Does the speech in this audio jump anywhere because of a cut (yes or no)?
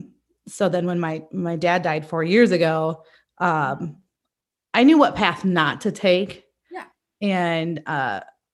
no